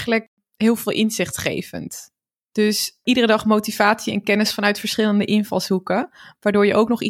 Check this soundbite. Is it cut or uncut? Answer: uncut